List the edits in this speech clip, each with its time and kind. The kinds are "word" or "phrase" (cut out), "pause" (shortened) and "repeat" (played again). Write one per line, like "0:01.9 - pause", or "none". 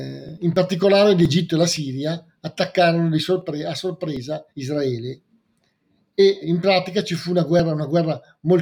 0:04.5 - pause
0:06.4 - word

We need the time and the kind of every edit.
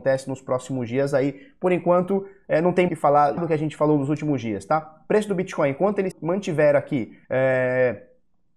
0:02.9 - word
0:03.4 - word
0:06.1 - word
0:07.2 - pause

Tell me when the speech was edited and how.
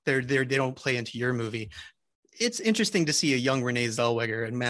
none

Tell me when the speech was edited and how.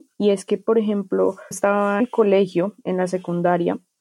0:01.5 - word
0:02.0 - word

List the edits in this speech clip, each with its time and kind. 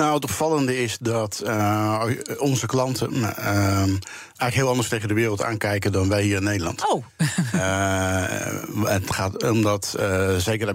none

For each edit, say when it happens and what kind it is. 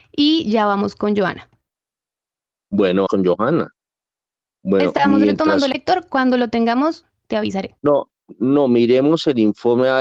0:03.1 - word
0:05.7 - phrase
0:07.8 - pause

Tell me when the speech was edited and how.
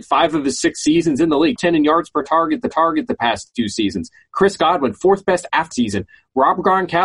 0:01.6 - word
0:02.7 - repeat
0:05.7 - phrase

